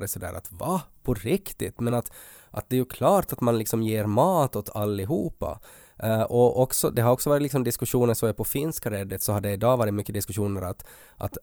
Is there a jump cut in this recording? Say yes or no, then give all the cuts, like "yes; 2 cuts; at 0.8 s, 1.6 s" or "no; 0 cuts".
no; 0 cuts